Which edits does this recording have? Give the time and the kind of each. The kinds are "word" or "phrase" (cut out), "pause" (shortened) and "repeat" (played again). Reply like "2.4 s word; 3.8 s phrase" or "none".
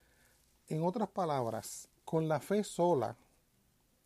2.0 s pause

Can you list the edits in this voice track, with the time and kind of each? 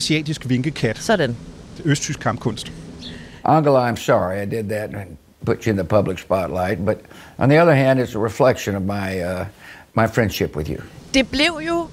none

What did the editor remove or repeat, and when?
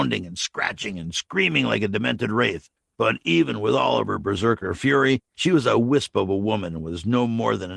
none

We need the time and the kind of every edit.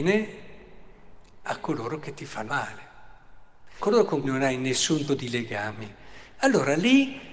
1.4 s word; 2.5 s word; 3.8 s word; 4.2 s word; 5.1 s word

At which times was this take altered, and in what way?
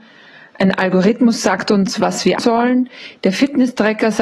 2.4 s word

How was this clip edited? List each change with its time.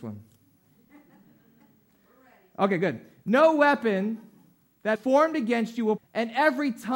5.0 s word; 6.0 s word

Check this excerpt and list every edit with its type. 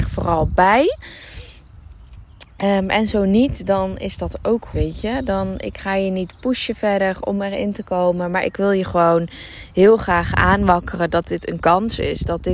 4.7 s word

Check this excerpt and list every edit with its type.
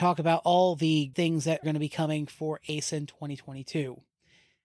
1.1 s word; 1.6 s word

